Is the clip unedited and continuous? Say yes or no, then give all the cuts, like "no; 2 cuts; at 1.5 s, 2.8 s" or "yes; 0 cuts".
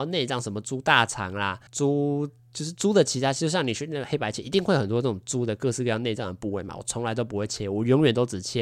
no; 1 cut; at 1.7 s